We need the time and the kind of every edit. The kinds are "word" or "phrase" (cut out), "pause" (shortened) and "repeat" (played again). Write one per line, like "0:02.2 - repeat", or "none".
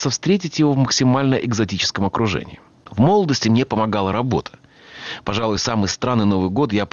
none